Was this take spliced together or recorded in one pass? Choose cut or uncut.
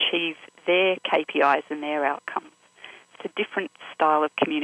cut